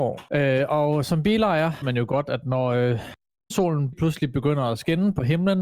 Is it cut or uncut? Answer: cut